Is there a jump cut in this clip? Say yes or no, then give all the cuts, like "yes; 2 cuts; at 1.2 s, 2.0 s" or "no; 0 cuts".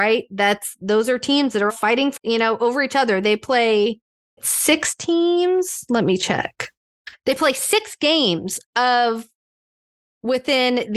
yes; 3 cuts; at 1.7 s, 2.2 s, 4.4 s